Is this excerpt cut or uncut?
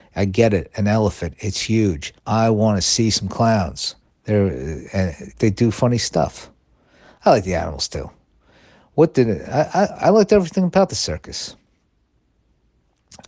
cut